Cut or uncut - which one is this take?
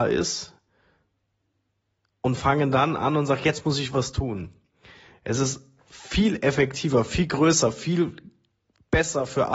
uncut